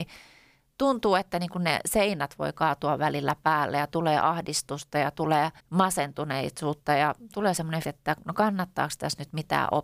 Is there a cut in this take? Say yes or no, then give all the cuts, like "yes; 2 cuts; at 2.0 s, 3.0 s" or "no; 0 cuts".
yes; 2 cuts; at 5.6 s, 7.8 s